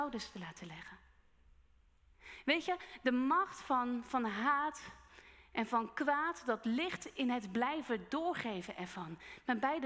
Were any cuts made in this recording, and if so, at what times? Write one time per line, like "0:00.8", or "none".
none